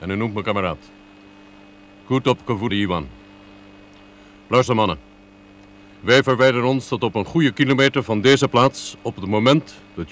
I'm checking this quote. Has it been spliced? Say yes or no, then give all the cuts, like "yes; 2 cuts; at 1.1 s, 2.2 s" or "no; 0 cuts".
yes; 1 cut; at 2.7 s